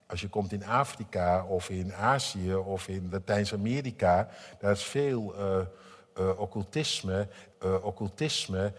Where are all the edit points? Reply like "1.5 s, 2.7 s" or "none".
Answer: 7.5 s

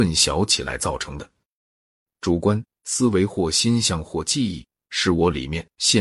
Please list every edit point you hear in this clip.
none

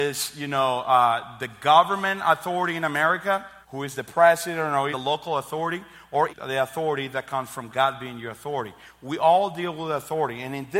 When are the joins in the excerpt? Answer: 3.6 s, 4.9 s, 6.3 s, 7.7 s

